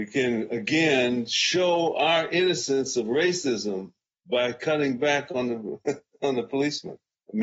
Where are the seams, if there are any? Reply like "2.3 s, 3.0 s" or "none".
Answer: none